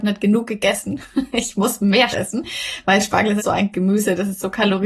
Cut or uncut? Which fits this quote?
cut